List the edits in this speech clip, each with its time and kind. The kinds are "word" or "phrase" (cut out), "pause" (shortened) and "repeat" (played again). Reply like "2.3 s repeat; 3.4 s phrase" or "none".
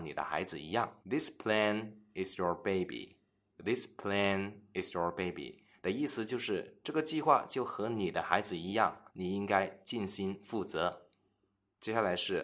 1.0 s pause; 9.1 s pause

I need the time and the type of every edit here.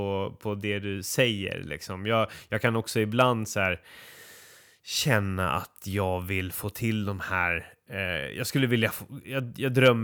none

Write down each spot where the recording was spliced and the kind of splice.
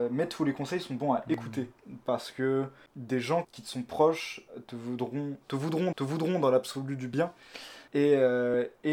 1.8 s pause; 3.4 s word; 5.9 s repeat; 7.9 s pause

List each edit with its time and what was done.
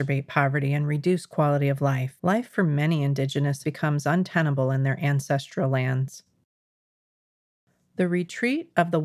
2.2 s pause; 3.6 s phrase

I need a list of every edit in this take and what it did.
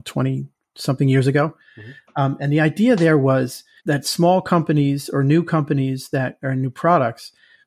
3.8 s word

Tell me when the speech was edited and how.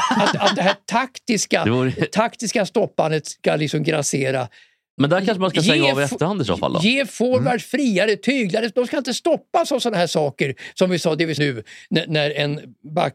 5.0 s word; 11.4 s phrase

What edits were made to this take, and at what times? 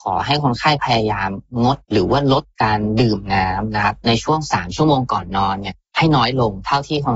1.8 s pause

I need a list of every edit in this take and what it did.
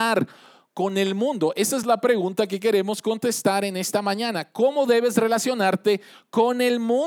none

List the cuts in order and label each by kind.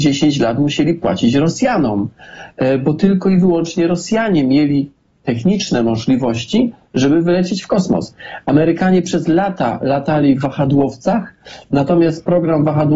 none

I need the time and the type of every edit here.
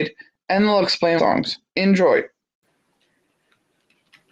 1.2 s phrase; 1.7 s pause

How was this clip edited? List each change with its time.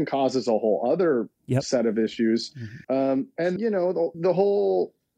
2.8 s pause; 3.6 s word; 4.1 s word

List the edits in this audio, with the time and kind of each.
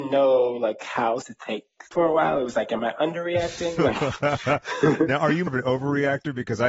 1.2 s word; 1.9 s word; 2.8 s phrase; 5.5 s word

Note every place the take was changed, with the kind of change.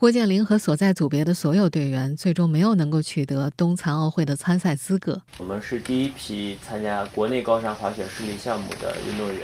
5.3 s pause

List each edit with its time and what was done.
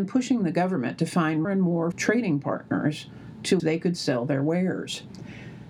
1.4 s word; 1.9 s word; 3.6 s word

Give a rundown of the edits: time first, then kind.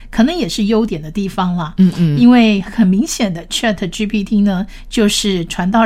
none

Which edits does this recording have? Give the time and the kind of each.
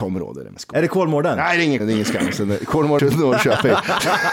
1.8 s word; 3.0 s word

